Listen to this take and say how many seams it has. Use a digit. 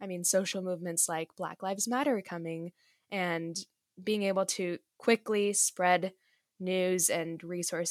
0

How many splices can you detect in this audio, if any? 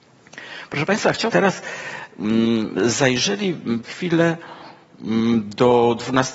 2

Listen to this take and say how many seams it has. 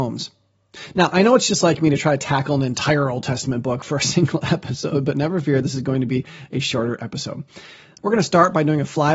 0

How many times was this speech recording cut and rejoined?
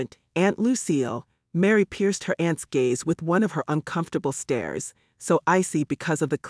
0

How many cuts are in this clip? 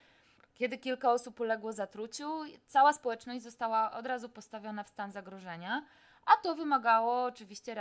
0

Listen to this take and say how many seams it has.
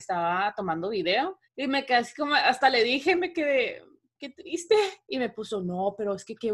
1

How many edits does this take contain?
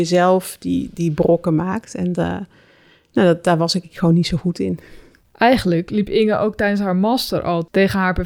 2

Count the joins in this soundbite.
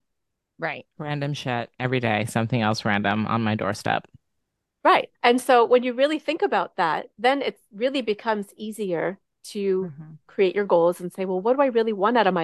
2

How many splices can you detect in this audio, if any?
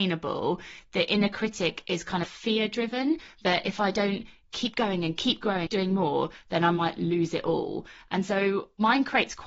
2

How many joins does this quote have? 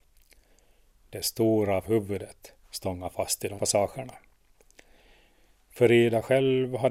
3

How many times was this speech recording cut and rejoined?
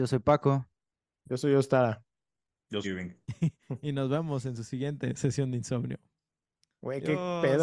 1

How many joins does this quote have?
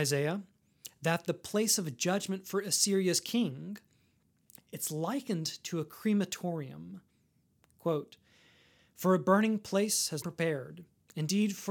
1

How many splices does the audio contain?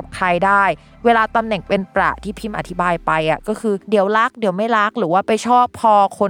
1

